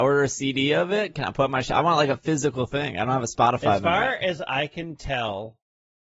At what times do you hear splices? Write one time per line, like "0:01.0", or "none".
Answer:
none